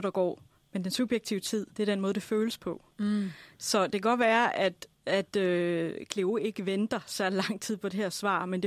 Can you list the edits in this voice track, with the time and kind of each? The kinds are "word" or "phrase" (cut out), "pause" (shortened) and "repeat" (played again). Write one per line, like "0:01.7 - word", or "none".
0:01.7 - pause
0:02.9 - pause